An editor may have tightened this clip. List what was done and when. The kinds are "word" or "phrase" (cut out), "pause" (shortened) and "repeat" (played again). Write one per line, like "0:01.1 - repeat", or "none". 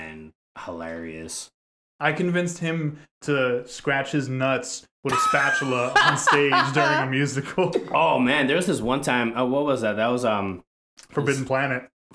none